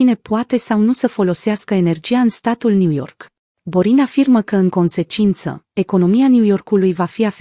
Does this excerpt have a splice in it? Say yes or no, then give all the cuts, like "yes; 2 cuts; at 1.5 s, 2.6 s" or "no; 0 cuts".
yes; 1 cut; at 3.5 s